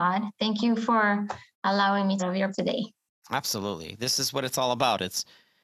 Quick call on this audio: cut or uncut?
cut